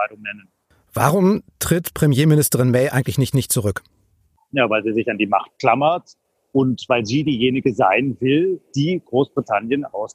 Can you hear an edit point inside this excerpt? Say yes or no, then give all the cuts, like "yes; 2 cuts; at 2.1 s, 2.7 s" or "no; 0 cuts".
yes; 2 cuts; at 3.3 s, 8.7 s